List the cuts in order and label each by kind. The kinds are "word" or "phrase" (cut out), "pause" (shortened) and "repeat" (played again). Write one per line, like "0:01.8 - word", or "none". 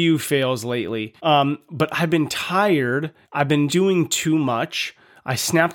0:01.2 - pause
0:03.2 - pause
0:03.7 - word